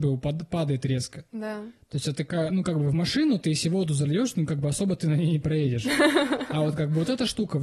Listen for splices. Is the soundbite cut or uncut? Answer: uncut